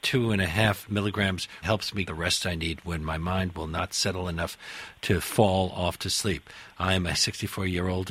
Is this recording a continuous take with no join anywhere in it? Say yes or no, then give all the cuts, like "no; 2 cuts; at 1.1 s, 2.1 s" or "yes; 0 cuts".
no; 3 cuts; at 1.6 s, 2.0 s, 7.1 s